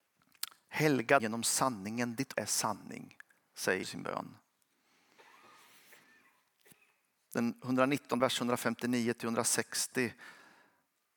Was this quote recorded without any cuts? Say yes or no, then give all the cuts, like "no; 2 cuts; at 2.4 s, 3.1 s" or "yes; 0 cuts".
no; 4 cuts; at 1.2 s, 2.3 s, 3.8 s, 8.2 s